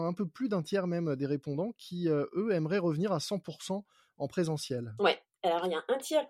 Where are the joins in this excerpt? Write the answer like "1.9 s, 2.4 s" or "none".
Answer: none